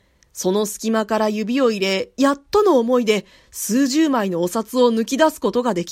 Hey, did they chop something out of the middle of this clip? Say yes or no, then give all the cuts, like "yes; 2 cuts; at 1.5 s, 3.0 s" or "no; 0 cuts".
no; 0 cuts